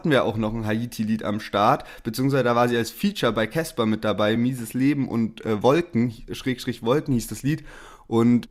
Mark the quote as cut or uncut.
uncut